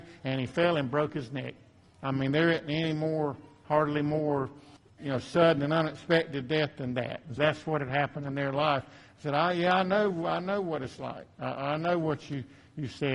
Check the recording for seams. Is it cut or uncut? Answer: cut